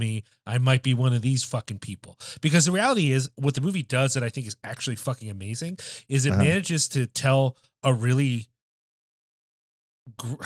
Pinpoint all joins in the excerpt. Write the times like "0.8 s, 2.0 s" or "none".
none

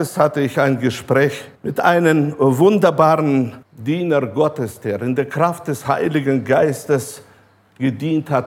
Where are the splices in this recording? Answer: 1.6 s, 3.6 s

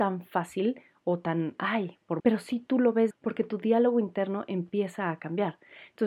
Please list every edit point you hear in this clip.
2.2 s, 3.1 s

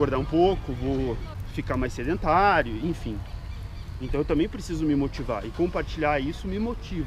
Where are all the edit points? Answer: none

